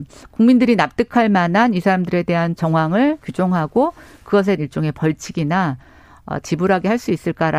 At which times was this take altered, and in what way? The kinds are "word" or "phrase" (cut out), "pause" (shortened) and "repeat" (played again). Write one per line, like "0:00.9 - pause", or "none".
0:02.6 - word
0:03.2 - word
0:04.6 - word
0:06.4 - word